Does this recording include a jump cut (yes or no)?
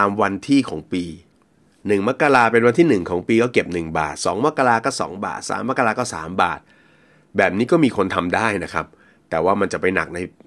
no